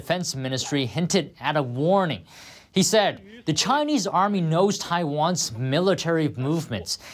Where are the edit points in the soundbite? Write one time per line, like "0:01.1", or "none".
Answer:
none